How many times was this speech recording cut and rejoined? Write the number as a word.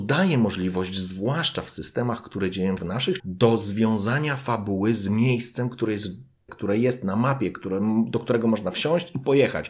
three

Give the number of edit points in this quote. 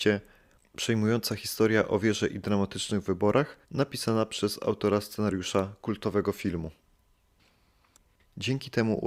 one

